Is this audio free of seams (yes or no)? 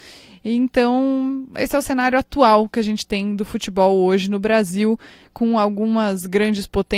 yes